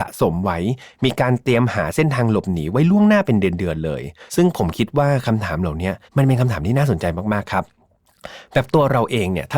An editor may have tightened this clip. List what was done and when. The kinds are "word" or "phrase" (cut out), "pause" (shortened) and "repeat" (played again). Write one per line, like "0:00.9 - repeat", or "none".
0:04.3 - pause
0:06.1 - pause